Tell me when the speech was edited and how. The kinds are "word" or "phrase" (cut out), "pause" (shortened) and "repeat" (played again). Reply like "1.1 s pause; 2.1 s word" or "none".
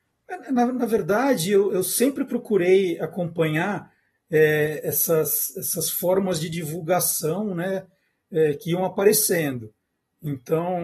none